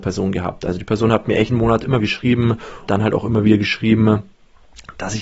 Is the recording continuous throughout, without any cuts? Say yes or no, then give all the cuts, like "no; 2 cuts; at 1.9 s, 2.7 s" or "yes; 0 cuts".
no; 3 cuts; at 1.5 s, 2.0 s, 2.9 s